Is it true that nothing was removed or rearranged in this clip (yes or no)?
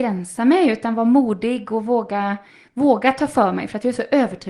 yes